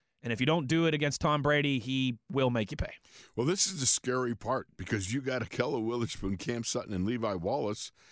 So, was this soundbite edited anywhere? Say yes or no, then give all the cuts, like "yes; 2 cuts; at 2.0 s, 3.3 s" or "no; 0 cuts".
no; 0 cuts